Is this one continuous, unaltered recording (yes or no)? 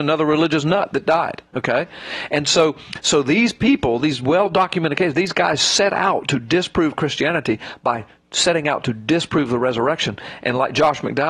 yes